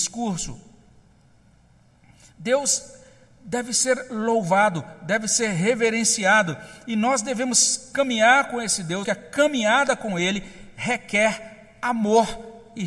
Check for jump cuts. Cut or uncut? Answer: cut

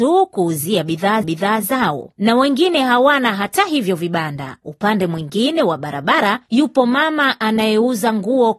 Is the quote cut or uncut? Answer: cut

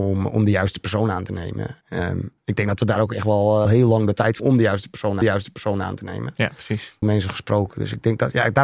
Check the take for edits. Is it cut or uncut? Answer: cut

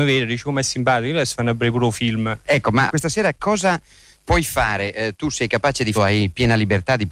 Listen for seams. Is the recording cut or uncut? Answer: cut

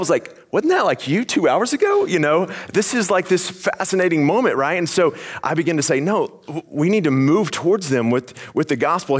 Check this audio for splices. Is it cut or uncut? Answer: uncut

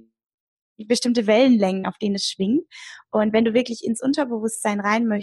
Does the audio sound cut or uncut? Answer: uncut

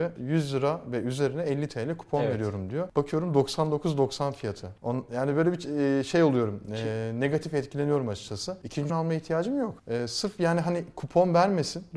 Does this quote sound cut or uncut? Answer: cut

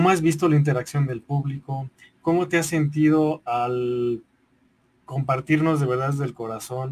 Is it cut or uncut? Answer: uncut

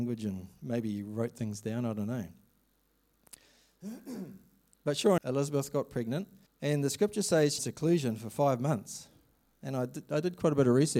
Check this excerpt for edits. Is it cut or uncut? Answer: cut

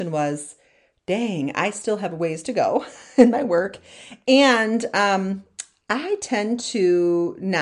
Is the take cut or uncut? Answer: uncut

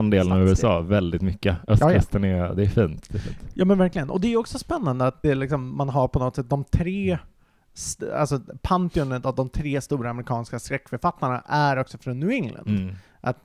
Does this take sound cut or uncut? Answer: cut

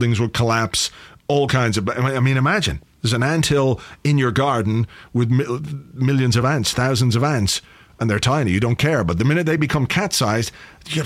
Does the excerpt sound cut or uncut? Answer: uncut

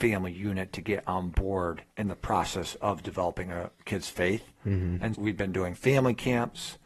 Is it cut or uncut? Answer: cut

